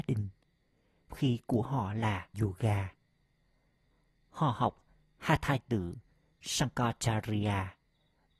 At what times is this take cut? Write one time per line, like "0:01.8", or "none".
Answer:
0:01.1
0:02.3
0:05.6